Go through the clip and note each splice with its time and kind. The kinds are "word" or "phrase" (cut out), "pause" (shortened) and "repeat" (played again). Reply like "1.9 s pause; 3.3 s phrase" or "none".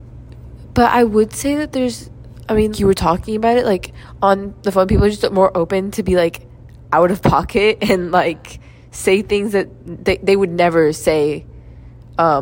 2.7 s word